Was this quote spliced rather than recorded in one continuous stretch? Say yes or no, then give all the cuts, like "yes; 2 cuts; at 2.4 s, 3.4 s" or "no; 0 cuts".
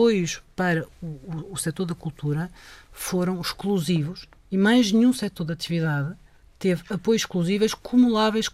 no; 0 cuts